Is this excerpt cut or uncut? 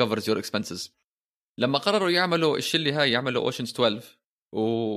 uncut